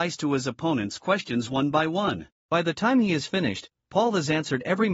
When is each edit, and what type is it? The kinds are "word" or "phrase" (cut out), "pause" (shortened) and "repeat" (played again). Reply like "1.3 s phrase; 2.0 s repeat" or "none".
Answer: 2.4 s pause